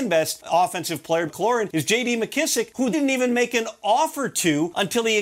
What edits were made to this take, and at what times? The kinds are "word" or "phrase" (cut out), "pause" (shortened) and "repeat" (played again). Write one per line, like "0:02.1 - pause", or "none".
0:01.3 - word
0:02.9 - word